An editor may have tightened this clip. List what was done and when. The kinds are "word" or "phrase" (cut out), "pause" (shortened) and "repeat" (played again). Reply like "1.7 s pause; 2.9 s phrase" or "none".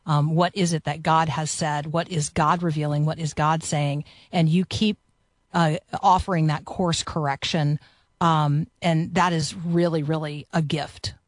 none